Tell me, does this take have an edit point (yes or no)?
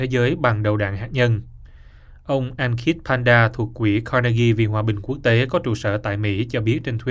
no